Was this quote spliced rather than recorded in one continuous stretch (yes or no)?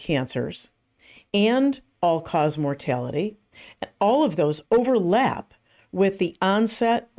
no